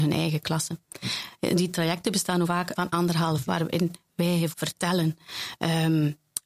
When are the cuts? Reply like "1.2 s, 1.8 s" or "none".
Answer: 2.4 s, 2.8 s, 3.4 s, 4.5 s